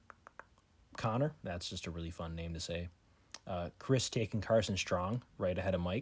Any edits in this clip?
yes; 1 cut; at 0.9 s

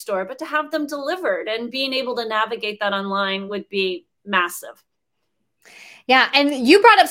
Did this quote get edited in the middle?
no; 0 cuts

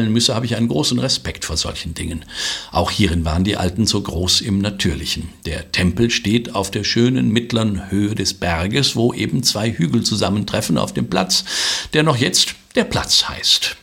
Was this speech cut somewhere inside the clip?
no; 0 cuts

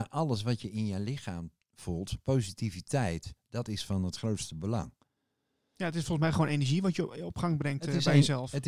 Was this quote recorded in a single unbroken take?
yes; 0 cuts

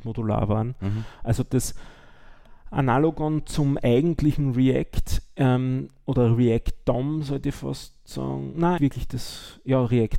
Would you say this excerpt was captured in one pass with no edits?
no; 1 cut; at 8.8 s

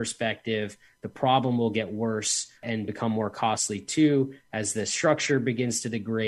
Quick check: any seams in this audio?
no; 0 cuts

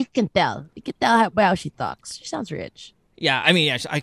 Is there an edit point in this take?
no; 0 cuts

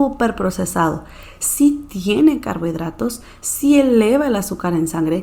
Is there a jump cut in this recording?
no; 0 cuts

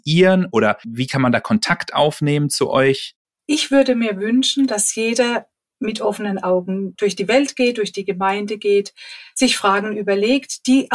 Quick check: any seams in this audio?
no; 0 cuts

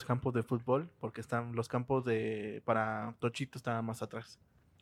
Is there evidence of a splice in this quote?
no; 0 cuts

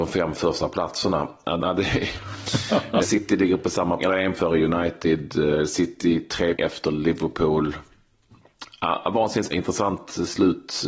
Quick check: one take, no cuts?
no; 6 cuts; at 1.6 s, 3.0 s, 4.0 s, 4.3 s, 6.5 s, 9.5 s

